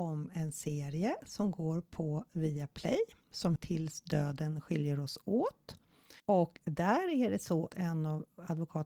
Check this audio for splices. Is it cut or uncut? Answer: cut